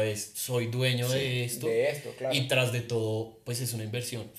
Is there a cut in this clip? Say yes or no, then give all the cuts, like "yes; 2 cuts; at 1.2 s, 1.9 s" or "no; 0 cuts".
no; 0 cuts